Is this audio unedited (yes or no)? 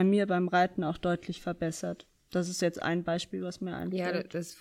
yes